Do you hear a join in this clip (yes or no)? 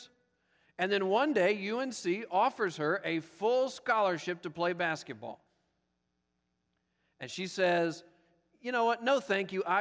no